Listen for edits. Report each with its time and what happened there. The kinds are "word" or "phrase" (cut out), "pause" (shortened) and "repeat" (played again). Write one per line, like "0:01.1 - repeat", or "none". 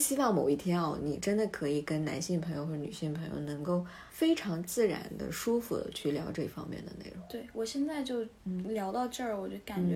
0:04.1 - pause